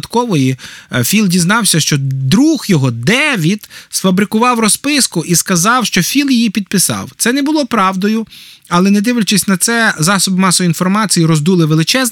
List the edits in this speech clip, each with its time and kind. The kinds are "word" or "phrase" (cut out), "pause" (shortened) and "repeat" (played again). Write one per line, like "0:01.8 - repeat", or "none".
none